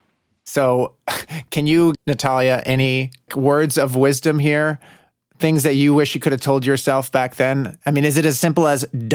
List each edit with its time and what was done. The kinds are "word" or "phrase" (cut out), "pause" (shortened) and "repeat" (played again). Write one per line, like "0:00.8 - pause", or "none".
0:01.9 - word
0:03.3 - word

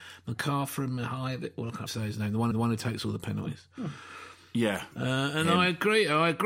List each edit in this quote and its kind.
0:01.9 - word
0:02.5 - repeat
0:04.9 - pause

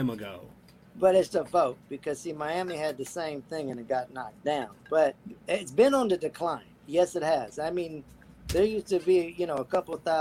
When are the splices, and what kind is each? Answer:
0:01.3 - word
0:05.4 - pause
0:06.8 - pause

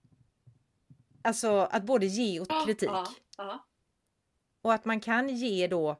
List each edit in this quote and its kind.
0:02.5 - word

